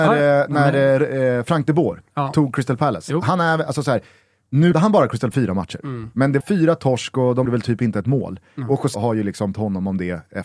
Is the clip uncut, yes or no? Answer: no